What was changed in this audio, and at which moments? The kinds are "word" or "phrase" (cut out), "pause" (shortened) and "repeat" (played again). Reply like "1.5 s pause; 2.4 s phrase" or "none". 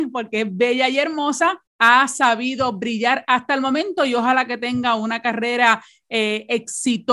1.7 s pause